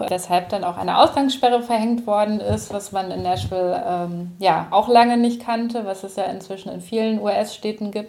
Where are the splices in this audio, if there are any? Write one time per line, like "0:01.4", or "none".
none